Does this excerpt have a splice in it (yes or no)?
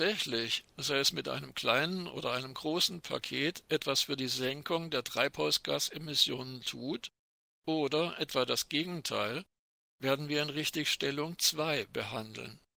no